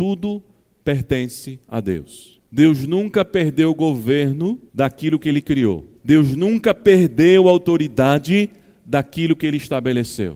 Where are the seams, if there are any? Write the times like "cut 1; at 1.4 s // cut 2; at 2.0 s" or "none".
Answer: cut 1; at 1.6 s // cut 2; at 2.5 s // cut 3; at 4.7 s // cut 4; at 6.0 s